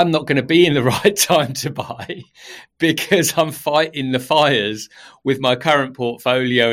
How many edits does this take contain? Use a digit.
0